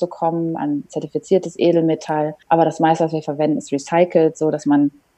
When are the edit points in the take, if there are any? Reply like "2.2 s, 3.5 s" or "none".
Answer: 2.4 s